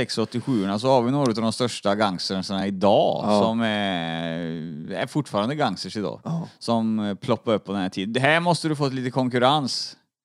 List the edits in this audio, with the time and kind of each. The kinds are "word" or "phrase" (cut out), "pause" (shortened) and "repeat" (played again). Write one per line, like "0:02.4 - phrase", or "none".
none

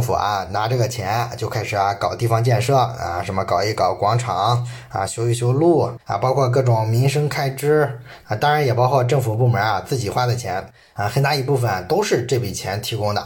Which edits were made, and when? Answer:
0:06.0 - pause

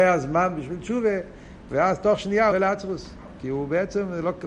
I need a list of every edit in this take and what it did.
0:02.5 - phrase

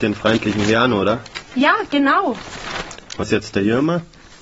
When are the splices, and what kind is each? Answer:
0:03.2 - word

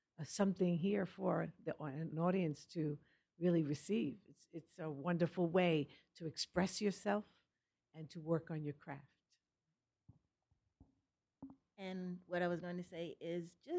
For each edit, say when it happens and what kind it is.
0:02.1 - word

